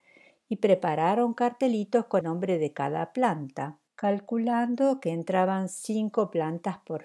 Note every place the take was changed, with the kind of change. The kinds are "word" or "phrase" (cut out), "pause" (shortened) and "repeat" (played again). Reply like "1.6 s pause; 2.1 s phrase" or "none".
2.2 s word; 3.9 s pause